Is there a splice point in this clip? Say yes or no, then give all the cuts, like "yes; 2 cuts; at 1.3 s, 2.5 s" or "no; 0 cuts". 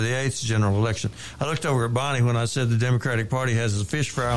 no; 0 cuts